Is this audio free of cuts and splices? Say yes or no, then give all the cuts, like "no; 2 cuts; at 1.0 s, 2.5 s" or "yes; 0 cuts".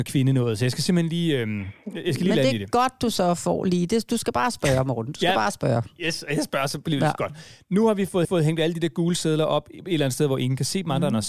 no; 1 cut; at 8.2 s